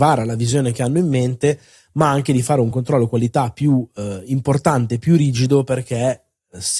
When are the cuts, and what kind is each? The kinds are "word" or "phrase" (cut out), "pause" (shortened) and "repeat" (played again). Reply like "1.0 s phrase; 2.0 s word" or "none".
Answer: none